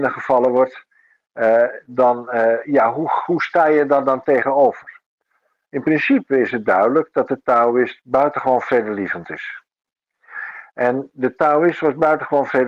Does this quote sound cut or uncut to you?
uncut